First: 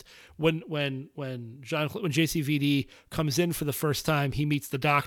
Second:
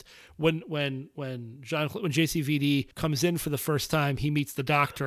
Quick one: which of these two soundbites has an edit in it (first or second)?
second